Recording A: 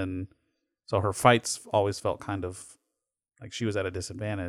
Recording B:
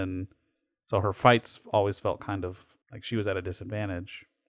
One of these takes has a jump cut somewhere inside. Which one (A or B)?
B